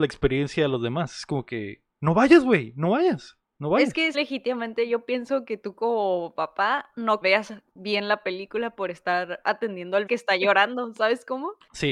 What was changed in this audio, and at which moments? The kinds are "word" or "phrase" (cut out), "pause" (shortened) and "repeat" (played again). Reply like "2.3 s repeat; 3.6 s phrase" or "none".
4.1 s word; 7.2 s phrase; 10.1 s word

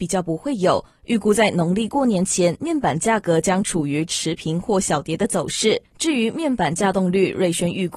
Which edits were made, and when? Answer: 5.9 s pause

